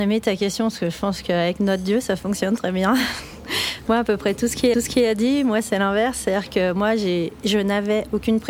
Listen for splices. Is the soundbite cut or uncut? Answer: cut